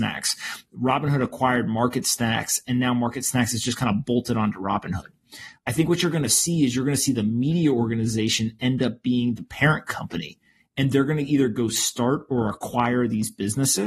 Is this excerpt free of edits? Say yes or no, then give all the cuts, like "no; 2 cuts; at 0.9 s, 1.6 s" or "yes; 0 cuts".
yes; 0 cuts